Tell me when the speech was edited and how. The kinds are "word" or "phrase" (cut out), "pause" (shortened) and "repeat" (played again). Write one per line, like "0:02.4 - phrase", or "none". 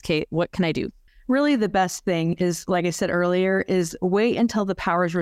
none

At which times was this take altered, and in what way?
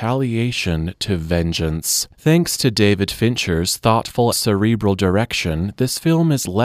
0:02.1 - pause
0:04.3 - word

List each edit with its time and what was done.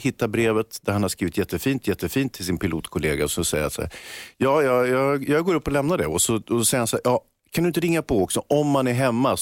0:01.8 - repeat

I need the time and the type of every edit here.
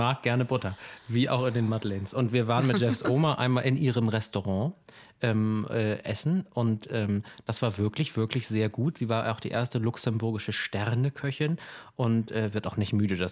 none

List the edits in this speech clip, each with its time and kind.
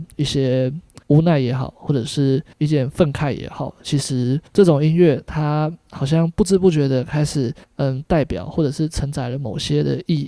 0:01.0 - pause
0:02.5 - pause
0:04.5 - pause
0:07.6 - pause

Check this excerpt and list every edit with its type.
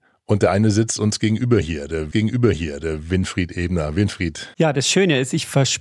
0:02.1 - repeat
0:04.5 - pause

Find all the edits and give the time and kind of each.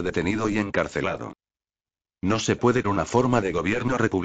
0:02.8 - word

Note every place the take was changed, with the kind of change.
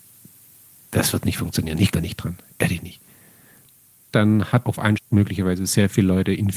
0:01.9 - word
0:04.6 - word
0:05.0 - word

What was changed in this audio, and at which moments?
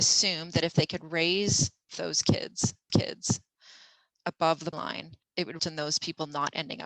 0:01.9 - phrase
0:02.9 - repeat
0:04.7 - word
0:05.2 - pause
0:05.6 - word

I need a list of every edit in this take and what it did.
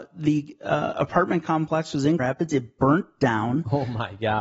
0:02.2 - word

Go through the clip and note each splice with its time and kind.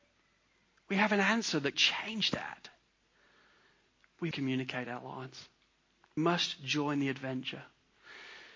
0:01.7 - word
0:04.3 - word
0:06.2 - word

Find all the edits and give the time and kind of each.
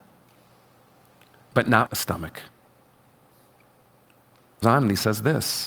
0:01.9 - word
0:04.6 - word

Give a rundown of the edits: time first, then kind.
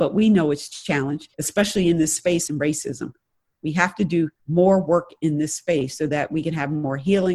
0:01.3 - pause
0:02.5 - phrase
0:04.4 - pause

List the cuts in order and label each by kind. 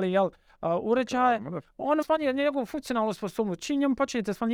0:02.0 - word

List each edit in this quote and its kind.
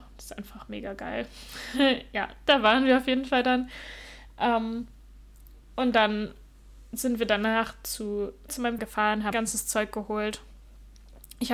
0:08.5 - word
0:08.8 - word
0:09.3 - word

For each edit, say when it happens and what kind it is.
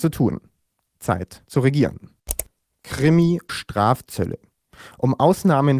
0:03.5 - word

